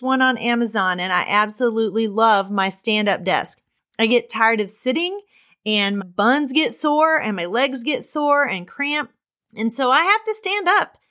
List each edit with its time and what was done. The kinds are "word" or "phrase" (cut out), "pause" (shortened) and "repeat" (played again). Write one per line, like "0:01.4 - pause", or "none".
0:06.0 - word